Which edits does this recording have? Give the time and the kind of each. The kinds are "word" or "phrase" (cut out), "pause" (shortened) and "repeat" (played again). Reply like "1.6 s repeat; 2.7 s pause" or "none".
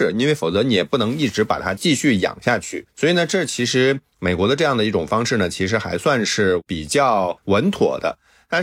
2.9 s pause

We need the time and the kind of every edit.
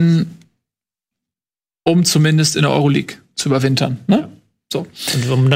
none

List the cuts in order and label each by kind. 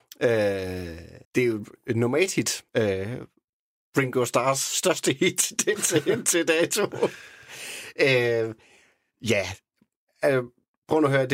1.2 s pause; 2.7 s pause

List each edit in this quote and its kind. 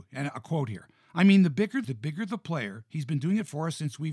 1.8 s word

